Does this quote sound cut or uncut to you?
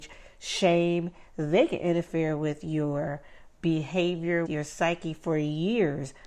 cut